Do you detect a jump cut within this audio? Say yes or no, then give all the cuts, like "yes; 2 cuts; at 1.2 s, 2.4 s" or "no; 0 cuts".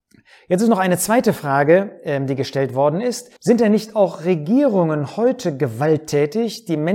yes; 1 cut; at 3.4 s